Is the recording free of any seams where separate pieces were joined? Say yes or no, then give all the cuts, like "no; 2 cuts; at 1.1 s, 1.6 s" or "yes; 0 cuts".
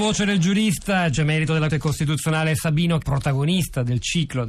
no; 3 cuts; at 1.1 s, 1.7 s, 3.0 s